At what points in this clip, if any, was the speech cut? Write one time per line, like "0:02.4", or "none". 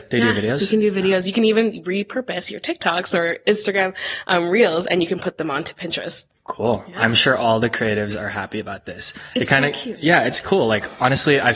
0:06.3